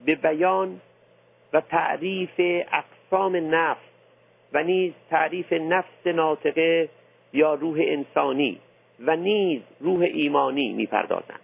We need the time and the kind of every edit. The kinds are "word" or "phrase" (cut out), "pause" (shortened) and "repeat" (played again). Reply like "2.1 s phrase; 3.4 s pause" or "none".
none